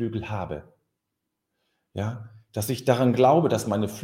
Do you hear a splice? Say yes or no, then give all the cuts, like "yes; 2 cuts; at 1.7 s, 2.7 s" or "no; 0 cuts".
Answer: no; 0 cuts